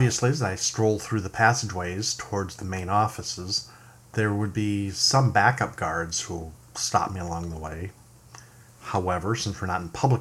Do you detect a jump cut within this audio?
no; 0 cuts

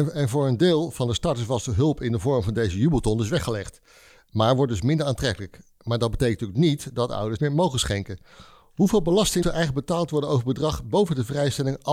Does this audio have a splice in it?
yes; 2 cuts; at 7.4 s, 9.4 s

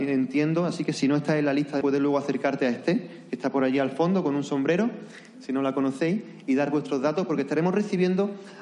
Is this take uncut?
no; 1 cut; at 1.8 s

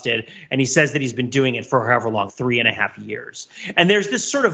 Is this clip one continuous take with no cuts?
no; 1 cut; at 2.3 s

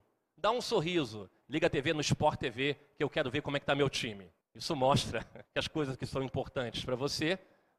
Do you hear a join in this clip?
yes; 3 cuts; at 1.4 s, 4.4 s, 5.4 s

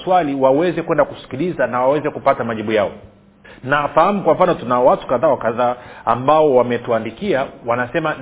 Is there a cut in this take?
yes; 1 cut; at 3.4 s

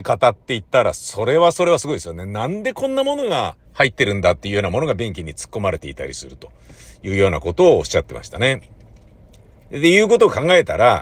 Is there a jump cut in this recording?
yes; 1 cut; at 3.7 s

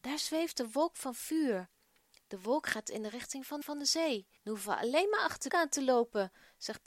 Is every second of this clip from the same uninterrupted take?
no; 3 cuts; at 3.6 s, 4.4 s, 5.5 s

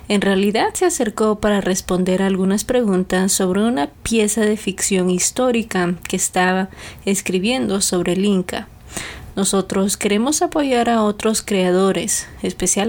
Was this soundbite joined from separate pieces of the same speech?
no; 0 cuts

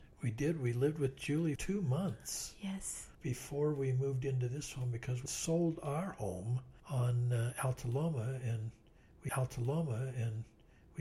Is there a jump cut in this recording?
yes; 5 cuts; at 1.6 s, 3.1 s, 5.3 s, 6.8 s, 9.3 s

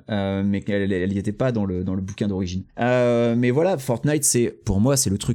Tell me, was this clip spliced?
yes; 1 cut; at 2.7 s

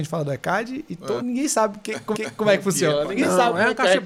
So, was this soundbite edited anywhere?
yes; 2 cuts; at 1.2 s, 2.1 s

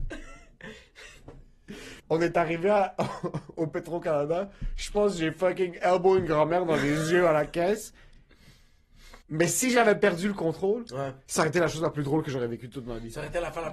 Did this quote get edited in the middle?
yes; 2 cuts; at 2.0 s, 9.2 s

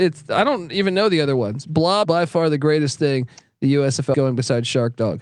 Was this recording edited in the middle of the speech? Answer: yes; 2 cuts; at 2.0 s, 4.1 s

